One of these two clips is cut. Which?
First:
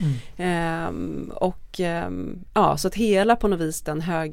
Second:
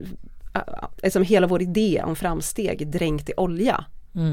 second; 1 cut; at 1.0 s

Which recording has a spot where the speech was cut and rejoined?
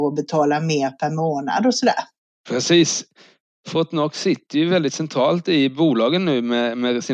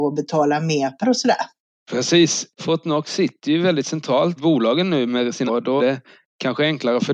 second; 6 cuts; at 1.0 s, 2.5 s, 4.4 s, 5.1 s, 5.5 s, 5.8 s

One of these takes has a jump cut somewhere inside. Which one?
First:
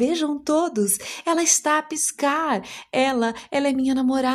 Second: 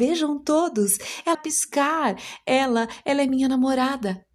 second; 1 cut; at 1.3 s

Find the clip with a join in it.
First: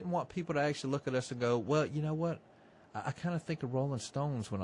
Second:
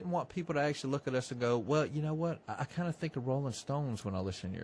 second; 1 cut; at 2.4 s

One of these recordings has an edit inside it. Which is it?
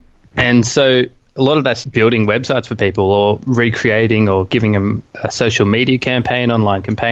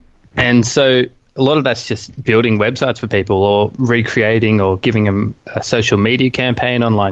first; 1 cut; at 1.8 s

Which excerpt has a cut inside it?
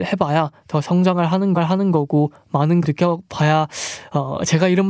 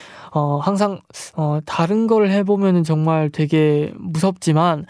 first; 2 cuts; at 1.5 s, 2.8 s

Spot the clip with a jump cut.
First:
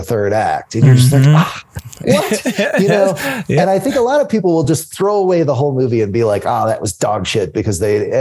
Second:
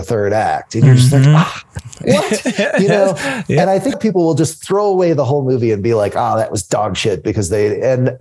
second; 1 cut; at 3.9 s

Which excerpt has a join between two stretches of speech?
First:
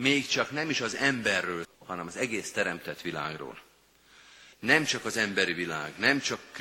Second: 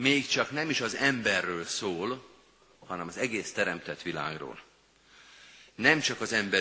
first; 2 cuts; at 1.6 s, 4.5 s

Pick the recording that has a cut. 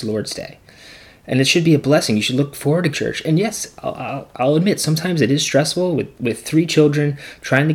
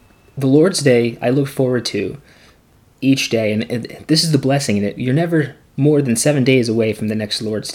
first; 1 cut; at 2.9 s

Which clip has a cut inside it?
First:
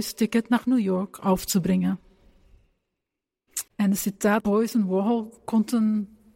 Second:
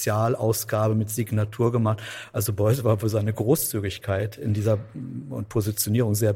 first; 3 cuts; at 3.7 s, 4.4 s, 5.4 s

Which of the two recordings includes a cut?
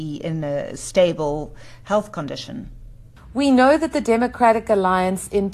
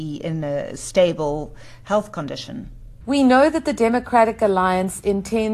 second; 1 cut; at 3.0 s

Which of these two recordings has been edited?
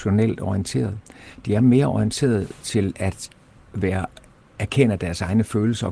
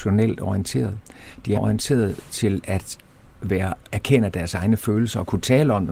second; 2 cuts; at 1.5 s, 3.8 s

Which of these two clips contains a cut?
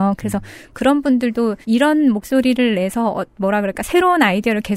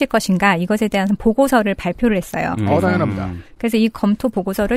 first; 1 cut; at 1.6 s

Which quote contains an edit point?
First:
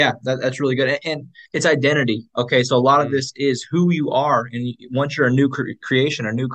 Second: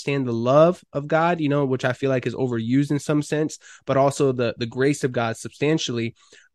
first; 1 cut; at 1.5 s

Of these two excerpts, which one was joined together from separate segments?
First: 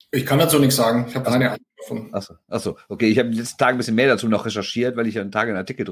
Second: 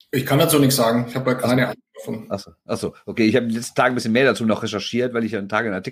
first; 1 cut; at 1.2 s

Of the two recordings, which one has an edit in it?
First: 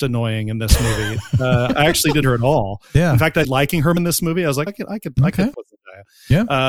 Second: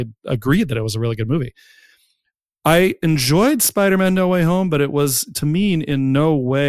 first; 6 cuts; at 1.7 s, 2.2 s, 3.4 s, 4.0 s, 4.7 s, 5.5 s

